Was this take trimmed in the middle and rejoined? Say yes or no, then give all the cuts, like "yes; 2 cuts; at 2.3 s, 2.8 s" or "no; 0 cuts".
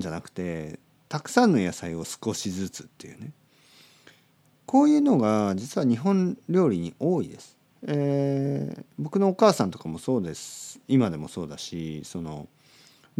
yes; 1 cut; at 7.7 s